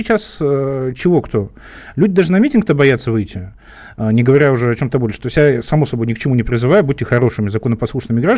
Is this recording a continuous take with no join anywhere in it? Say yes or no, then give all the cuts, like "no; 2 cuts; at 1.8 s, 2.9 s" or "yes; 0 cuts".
yes; 0 cuts